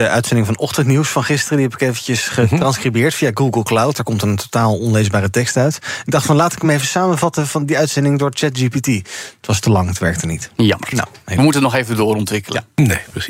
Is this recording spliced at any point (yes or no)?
no